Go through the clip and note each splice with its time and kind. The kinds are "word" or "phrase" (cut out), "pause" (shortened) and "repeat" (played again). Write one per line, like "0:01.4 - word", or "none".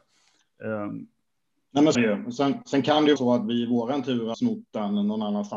0:01.9 - word
0:03.2 - word
0:04.3 - word